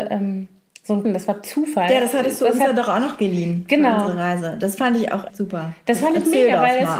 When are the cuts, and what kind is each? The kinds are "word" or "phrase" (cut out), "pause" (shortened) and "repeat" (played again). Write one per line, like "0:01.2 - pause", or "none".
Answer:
0:01.0 - word
0:05.3 - word